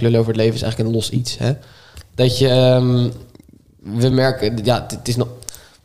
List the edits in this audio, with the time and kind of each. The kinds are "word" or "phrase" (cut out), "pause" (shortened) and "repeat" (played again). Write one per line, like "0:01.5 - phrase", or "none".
none